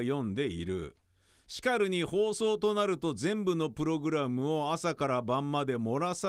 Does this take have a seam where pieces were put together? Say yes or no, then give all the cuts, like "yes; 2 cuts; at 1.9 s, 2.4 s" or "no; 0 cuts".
no; 0 cuts